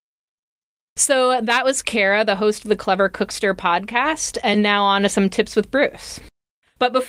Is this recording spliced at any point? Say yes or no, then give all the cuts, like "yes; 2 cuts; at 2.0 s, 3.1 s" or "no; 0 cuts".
no; 0 cuts